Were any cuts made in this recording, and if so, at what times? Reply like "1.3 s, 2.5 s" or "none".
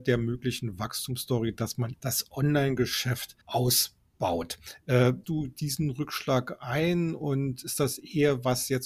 1.9 s, 3.4 s, 5.2 s

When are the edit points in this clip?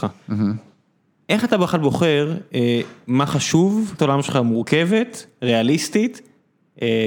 4.0 s

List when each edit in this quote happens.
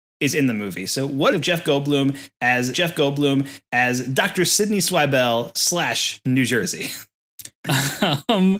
1.3 s, 2.7 s, 7.5 s

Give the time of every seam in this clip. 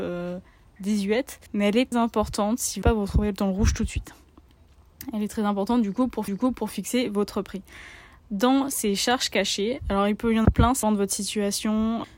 1.5 s, 1.9 s, 2.8 s, 6.3 s, 10.4 s, 10.8 s

